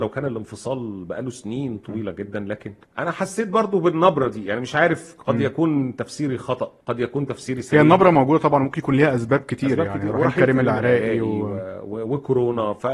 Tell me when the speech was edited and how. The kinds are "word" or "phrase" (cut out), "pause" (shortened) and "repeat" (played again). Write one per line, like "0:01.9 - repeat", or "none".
0:02.8 - pause
0:06.8 - pause